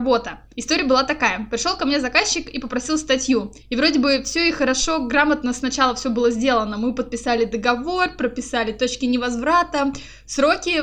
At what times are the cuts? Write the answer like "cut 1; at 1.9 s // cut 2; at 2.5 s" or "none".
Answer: cut 1; at 3.6 s